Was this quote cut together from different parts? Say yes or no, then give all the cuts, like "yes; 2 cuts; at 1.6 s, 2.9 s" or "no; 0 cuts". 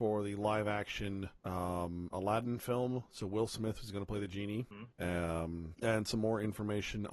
no; 0 cuts